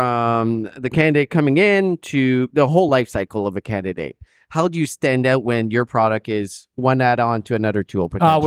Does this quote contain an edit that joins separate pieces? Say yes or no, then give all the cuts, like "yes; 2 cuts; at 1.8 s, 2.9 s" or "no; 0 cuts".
no; 0 cuts